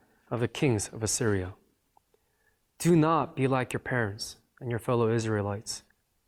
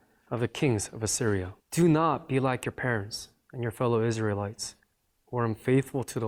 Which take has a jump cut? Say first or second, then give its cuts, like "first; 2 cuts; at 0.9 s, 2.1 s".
second; 1 cut; at 1.6 s